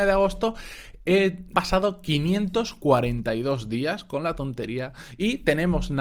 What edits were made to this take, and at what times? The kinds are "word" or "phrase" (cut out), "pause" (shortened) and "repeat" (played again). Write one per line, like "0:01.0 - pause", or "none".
0:01.5 - word